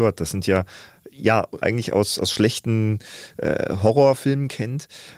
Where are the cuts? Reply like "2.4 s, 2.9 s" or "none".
1.6 s